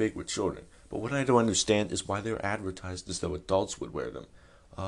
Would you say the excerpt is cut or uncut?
uncut